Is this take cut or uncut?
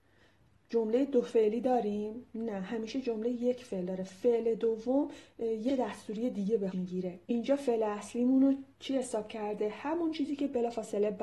cut